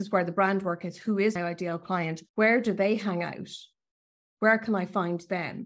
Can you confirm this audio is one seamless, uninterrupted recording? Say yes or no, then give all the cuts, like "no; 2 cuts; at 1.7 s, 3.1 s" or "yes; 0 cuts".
no; 2 cuts; at 1.4 s, 2.3 s